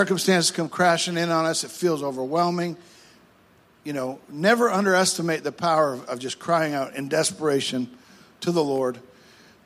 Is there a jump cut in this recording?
no; 0 cuts

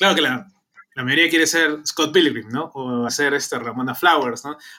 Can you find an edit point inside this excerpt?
yes; 1 cut; at 3.1 s

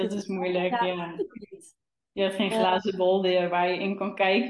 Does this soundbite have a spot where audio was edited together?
no; 0 cuts

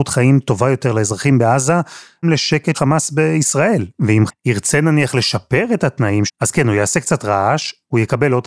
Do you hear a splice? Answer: yes; 4 cuts; at 2.2 s, 2.7 s, 4.3 s, 6.3 s

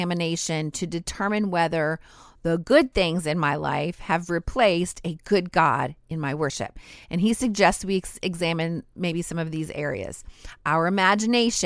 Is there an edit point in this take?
no; 0 cuts

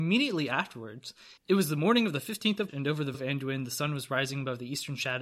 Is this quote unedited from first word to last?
no; 3 cuts; at 1.4 s, 2.7 s, 3.1 s

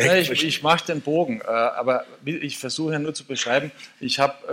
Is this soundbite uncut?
yes; 0 cuts

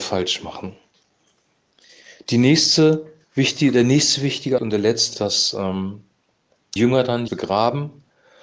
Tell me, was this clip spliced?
yes; 4 cuts; at 4.6 s, 5.1 s, 6.8 s, 7.3 s

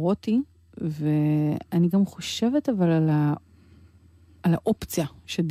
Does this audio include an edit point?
no; 0 cuts

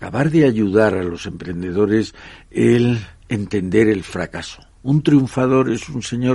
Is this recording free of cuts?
no; 2 cuts; at 3.2 s, 4.7 s

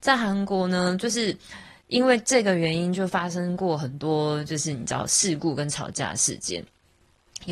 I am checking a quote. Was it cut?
no; 0 cuts

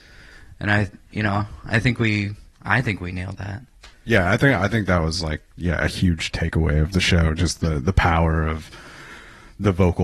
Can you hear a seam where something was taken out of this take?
yes; 2 cuts; at 2.5 s, 3.9 s

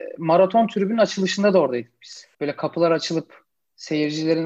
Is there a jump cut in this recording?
yes; 1 cut; at 2.3 s

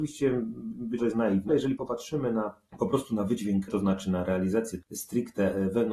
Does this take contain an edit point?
yes; 4 cuts; at 1.0 s, 1.5 s, 3.7 s, 4.8 s

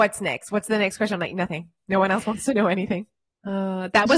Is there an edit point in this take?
no; 0 cuts

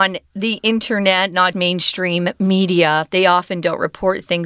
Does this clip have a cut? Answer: yes; 1 cut; at 1.5 s

